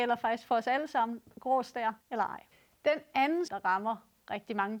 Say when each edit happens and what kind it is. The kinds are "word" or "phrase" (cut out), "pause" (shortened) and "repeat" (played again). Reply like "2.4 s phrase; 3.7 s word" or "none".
2.0 s pause; 2.5 s pause; 3.5 s word